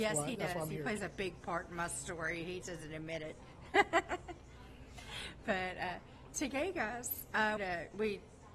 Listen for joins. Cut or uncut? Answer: cut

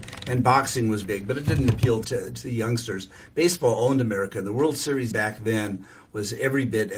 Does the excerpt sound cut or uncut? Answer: cut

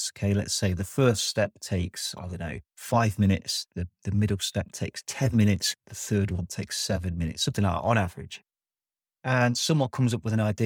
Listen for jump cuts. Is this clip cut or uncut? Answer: uncut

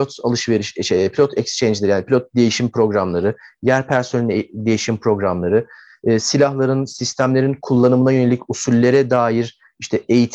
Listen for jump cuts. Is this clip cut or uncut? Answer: uncut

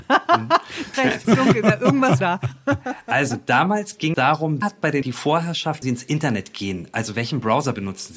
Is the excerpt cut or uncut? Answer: cut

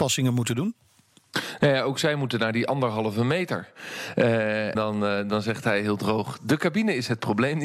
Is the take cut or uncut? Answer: cut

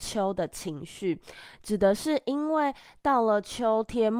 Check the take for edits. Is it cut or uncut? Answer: uncut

